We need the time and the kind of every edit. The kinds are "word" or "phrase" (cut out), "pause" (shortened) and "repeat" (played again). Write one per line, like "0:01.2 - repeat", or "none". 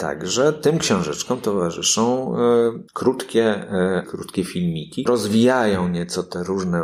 0:02.9 - pause
0:04.0 - word
0:05.1 - phrase

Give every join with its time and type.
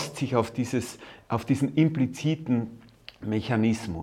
none

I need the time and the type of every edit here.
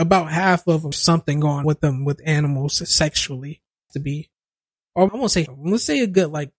0:00.9 - word
0:01.6 - word
0:03.9 - word
0:05.1 - word
0:05.5 - word

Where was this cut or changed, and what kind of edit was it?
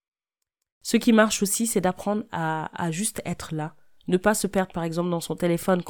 none

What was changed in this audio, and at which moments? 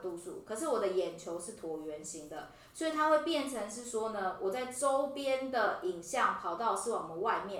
none

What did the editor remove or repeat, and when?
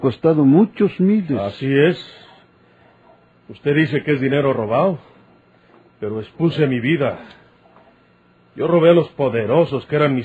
none

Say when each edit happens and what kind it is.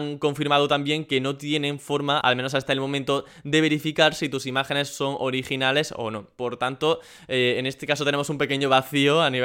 none

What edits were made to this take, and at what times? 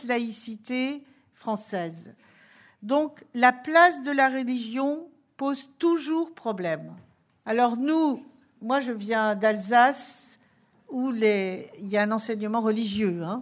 none

